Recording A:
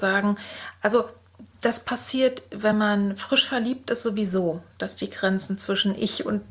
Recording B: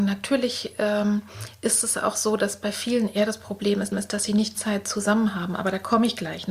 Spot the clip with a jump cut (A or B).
B